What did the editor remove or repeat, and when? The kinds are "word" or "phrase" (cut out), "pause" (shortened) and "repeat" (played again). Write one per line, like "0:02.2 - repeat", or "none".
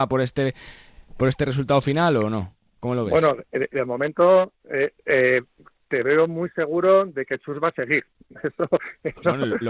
0:01.1 - pause